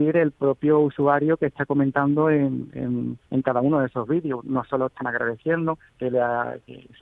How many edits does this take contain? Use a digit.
2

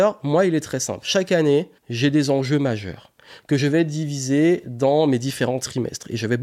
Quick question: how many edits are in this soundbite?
1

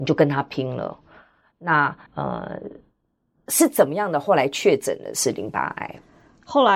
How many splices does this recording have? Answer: 1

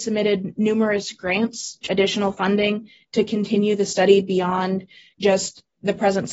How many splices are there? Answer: 1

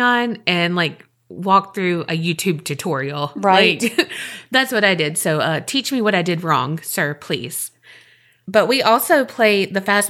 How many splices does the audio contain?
0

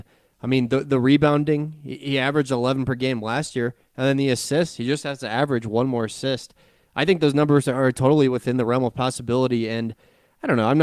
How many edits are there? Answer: 0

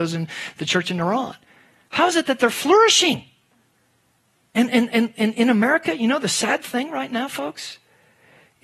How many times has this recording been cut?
0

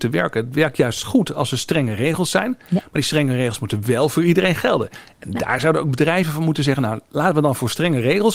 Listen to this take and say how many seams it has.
0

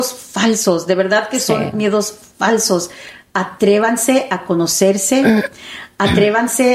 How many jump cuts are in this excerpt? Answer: 0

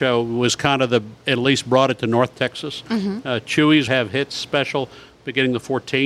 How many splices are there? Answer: 1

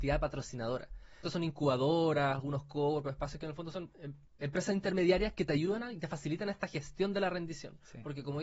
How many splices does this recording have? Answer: 2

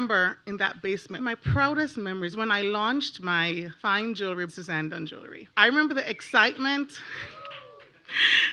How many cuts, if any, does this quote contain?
5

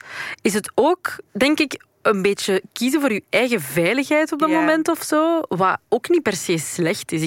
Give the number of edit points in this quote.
1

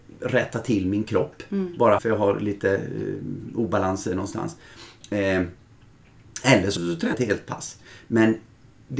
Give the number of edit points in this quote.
3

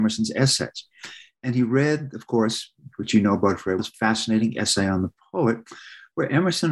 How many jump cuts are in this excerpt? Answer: 1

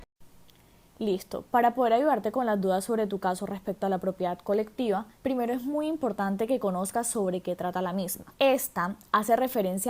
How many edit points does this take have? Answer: 2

